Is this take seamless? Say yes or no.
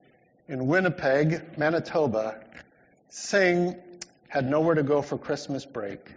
yes